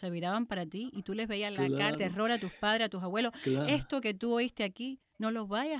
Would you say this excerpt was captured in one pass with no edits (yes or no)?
no